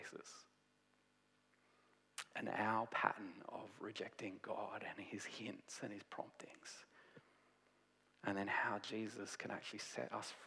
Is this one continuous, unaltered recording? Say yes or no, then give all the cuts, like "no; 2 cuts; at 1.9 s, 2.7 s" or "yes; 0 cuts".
yes; 0 cuts